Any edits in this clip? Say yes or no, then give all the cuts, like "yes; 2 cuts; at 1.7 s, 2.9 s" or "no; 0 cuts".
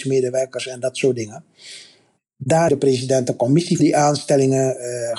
yes; 2 cuts; at 2.7 s, 3.8 s